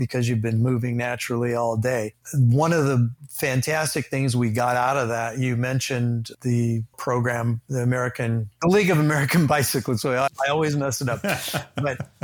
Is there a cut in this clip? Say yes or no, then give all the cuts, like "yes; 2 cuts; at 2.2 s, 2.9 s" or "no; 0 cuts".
yes; 2 cuts; at 6.9 s, 10.3 s